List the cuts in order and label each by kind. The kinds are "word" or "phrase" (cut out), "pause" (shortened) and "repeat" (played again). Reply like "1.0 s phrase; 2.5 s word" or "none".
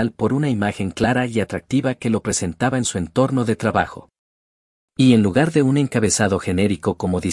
none